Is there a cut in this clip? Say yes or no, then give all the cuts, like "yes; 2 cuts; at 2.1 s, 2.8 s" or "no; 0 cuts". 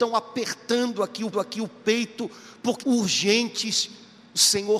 yes; 2 cuts; at 1.3 s, 2.8 s